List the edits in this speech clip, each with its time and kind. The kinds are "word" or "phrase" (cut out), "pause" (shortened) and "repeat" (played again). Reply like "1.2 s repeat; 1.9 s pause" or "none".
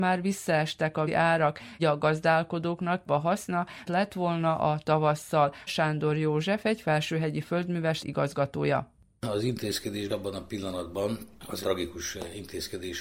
1.1 s word; 1.8 s word; 3.1 s word; 3.9 s word; 5.7 s word; 8.0 s word; 10.1 s word; 11.6 s word